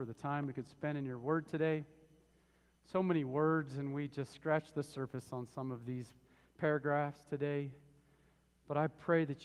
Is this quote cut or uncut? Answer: uncut